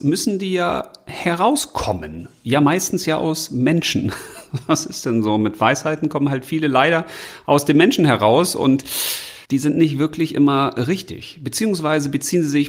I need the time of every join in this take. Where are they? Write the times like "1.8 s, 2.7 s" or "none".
9.4 s

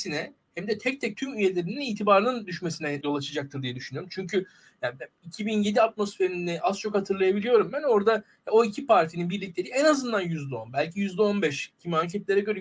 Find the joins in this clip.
3.0 s

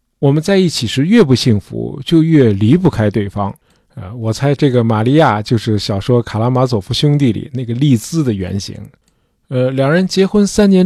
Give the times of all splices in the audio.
none

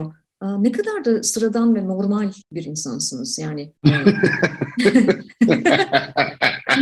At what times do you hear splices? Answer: 2.4 s, 3.8 s

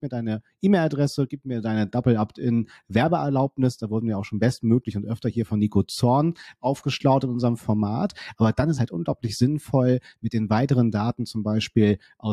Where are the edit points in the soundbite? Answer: 8.8 s

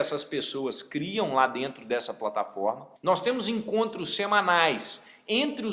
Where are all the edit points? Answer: 3.0 s

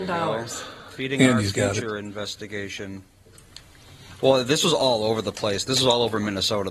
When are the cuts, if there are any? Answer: none

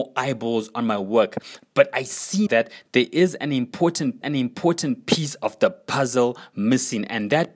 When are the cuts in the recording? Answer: 2.5 s, 4.2 s

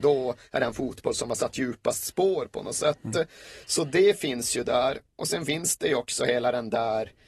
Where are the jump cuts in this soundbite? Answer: 3.6 s

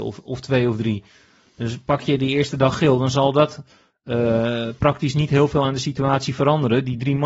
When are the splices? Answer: none

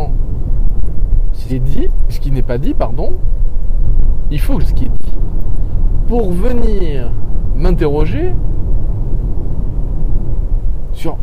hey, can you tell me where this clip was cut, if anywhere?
1.5 s, 2.1 s, 4.6 s

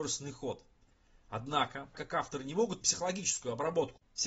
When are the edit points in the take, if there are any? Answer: 1.9 s, 2.8 s

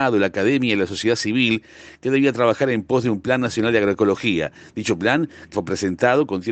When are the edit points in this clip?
5.5 s

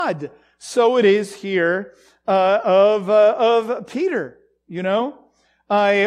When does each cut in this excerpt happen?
none

